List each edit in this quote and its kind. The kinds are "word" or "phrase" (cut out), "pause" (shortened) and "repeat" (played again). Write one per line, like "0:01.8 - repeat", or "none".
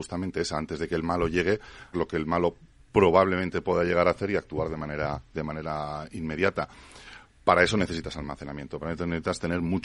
0:01.9 - word